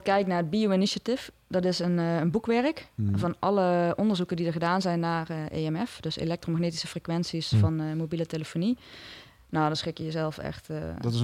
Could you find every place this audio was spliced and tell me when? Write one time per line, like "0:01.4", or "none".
none